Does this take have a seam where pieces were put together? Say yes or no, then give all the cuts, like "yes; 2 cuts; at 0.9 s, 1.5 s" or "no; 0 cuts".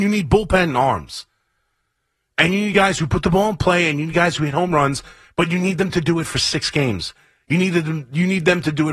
no; 0 cuts